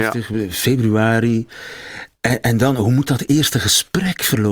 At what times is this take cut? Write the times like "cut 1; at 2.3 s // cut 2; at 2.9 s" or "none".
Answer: none